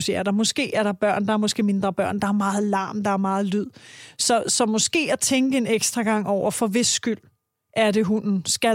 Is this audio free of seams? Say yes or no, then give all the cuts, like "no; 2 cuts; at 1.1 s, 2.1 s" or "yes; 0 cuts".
yes; 0 cuts